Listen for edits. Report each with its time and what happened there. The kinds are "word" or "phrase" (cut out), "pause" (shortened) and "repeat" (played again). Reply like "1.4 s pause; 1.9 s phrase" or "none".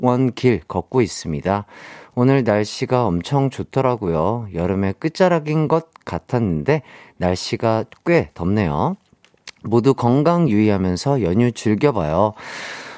none